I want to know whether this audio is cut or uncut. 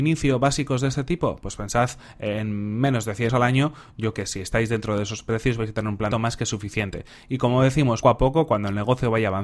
cut